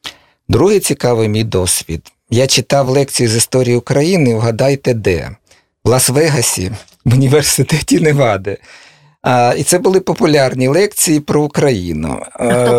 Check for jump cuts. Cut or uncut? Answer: uncut